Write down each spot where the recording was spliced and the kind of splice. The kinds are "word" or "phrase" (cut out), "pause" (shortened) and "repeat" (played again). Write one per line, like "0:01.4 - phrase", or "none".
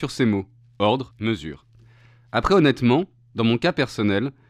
0:01.1 - word